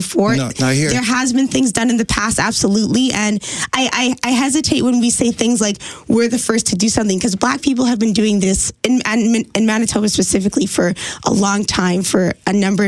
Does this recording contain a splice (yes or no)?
yes